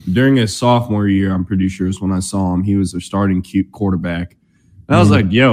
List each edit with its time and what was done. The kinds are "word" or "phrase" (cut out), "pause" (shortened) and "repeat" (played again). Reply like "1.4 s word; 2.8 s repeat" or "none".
none